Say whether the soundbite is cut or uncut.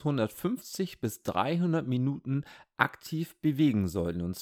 uncut